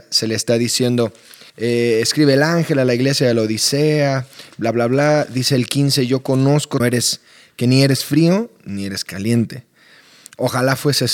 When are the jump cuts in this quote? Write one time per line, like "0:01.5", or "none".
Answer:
0:01.5
0:06.8